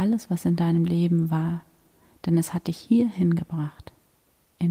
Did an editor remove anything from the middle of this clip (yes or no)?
no